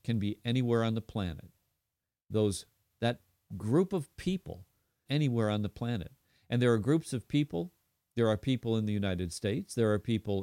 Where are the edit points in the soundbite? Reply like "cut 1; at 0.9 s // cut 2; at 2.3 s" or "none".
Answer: cut 1; at 2.9 s // cut 2; at 5.1 s

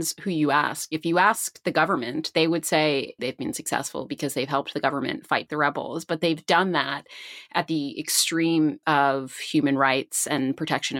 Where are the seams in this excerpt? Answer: cut 1; at 3.2 s // cut 2; at 5.5 s // cut 3; at 8.8 s

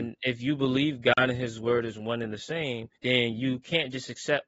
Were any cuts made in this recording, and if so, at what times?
cut 1; at 3.0 s

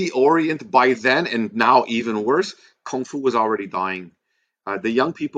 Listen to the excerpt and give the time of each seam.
none

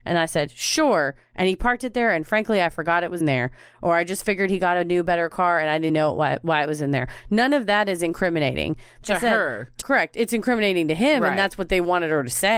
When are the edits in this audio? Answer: cut 1; at 3.2 s // cut 2; at 5.9 s // cut 3; at 9.0 s // cut 4; at 9.8 s

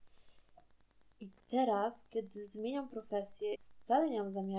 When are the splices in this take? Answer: cut 1; at 3.5 s

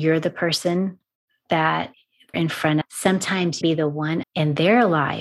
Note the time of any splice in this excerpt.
cut 1; at 2.3 s // cut 2; at 2.8 s // cut 3; at 3.6 s // cut 4; at 4.2 s

